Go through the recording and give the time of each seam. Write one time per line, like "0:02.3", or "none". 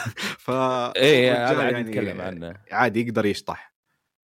none